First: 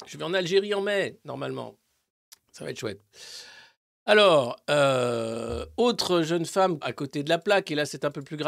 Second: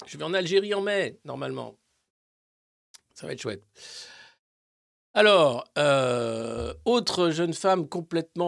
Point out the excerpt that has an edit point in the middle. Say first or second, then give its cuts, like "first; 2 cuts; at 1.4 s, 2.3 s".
first; 3 cuts; at 2.2 s, 3.8 s, 6.8 s